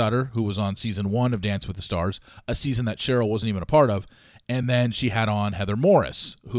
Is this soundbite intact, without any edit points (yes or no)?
yes